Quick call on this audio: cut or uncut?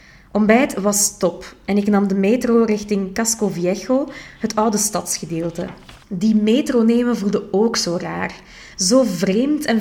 cut